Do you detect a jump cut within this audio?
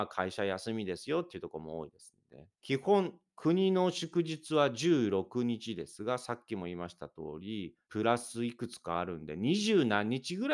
yes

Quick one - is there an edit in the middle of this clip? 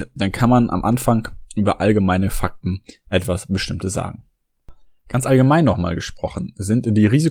no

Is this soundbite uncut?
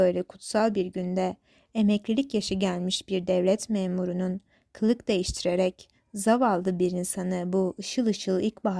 yes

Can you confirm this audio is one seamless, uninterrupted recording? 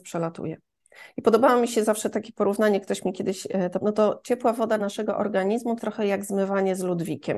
no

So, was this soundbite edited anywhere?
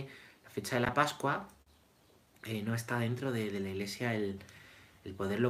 no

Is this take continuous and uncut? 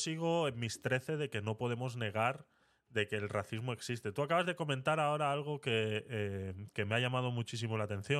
yes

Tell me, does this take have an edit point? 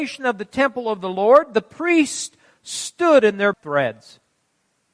yes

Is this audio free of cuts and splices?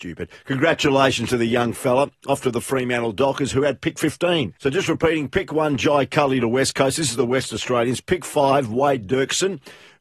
no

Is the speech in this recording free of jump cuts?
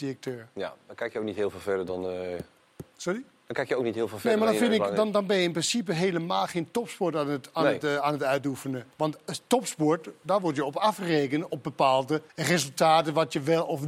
no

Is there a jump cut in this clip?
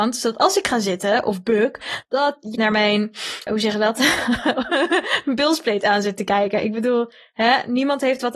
yes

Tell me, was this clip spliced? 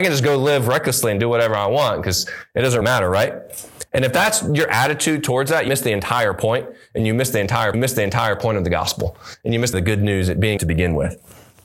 yes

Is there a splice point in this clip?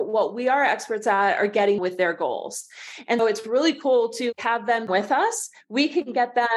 yes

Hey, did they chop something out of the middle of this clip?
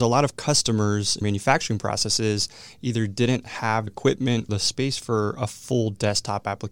yes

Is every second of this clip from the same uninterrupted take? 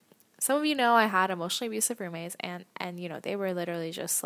yes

